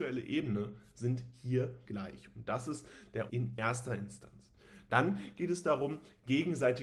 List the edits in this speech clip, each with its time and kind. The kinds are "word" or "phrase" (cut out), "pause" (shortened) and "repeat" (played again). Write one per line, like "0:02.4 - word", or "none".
0:01.8 - word
0:03.3 - word

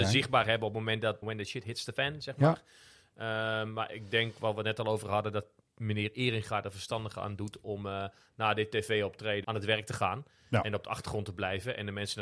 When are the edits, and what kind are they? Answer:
0:01.2 - word
0:05.6 - pause
0:09.4 - word

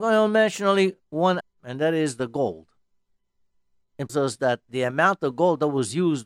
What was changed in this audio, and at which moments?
0:01.4 - word
0:04.1 - phrase

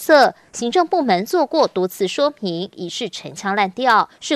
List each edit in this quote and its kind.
none

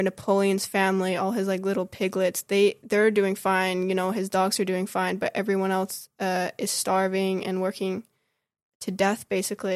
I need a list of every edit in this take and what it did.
none

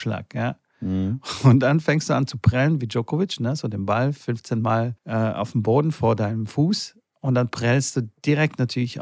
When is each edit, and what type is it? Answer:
0:05.0 - pause

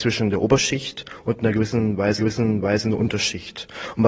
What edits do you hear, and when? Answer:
0:02.2 - repeat

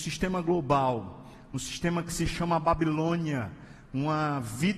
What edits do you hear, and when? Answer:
none

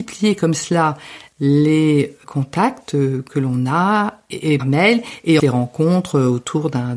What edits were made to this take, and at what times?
0:02.2 - word
0:04.6 - word
0:05.4 - word

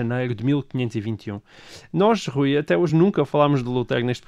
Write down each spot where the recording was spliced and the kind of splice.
none

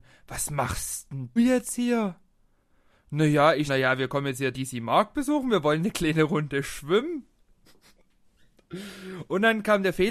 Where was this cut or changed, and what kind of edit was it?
0:01.4 - word
0:03.7 - word
0:04.5 - word

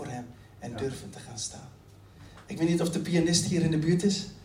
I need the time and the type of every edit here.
none

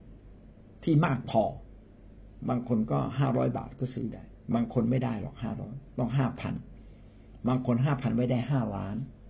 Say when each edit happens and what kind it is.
0:04.4 - pause

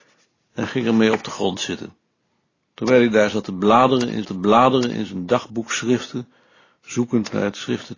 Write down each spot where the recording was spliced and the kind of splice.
0:02.2 - pause
0:04.2 - repeat

